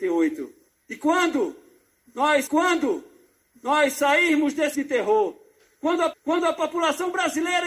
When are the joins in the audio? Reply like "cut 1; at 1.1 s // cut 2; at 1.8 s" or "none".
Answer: cut 1; at 2.5 s // cut 2; at 4.7 s // cut 3; at 6.1 s